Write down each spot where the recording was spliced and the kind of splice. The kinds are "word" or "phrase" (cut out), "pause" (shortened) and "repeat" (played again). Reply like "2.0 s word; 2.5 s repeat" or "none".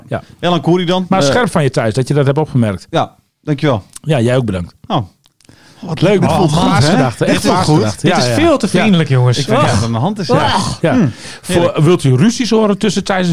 none